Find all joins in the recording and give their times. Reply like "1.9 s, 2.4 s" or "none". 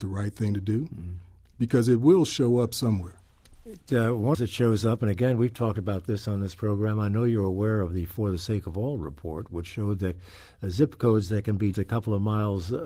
4.3 s, 11.7 s

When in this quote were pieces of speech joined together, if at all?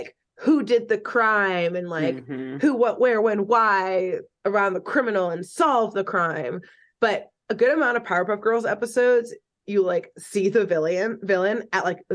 none

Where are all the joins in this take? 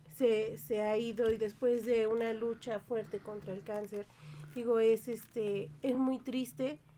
none

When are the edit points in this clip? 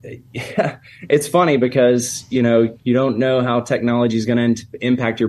none

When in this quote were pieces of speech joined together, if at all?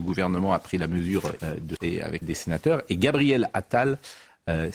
1.4 s, 1.8 s, 2.2 s

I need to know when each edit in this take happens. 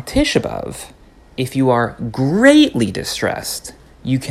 none

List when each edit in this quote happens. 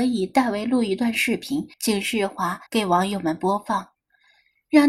1.7 s, 2.7 s

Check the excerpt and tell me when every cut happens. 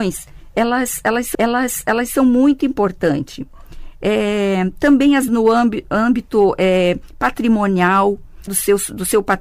1.3 s, 5.3 s, 8.5 s

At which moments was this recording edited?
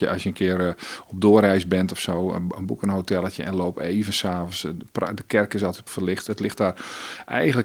5.9 s

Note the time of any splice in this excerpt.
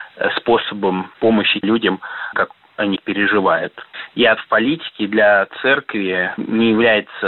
1.6 s, 2.3 s, 3.0 s, 4.4 s

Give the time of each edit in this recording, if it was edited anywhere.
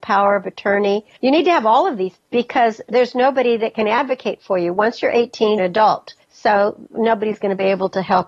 1.2 s, 2.2 s, 5.6 s, 6.2 s

